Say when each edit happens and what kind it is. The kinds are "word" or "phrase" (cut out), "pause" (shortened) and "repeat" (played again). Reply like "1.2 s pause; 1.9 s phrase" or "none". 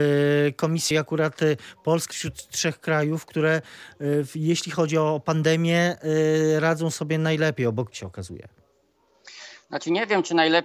0.9 s word; 2.1 s word; 7.9 s phrase